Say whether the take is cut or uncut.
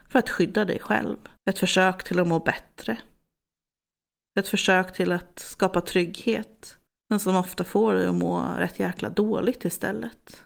cut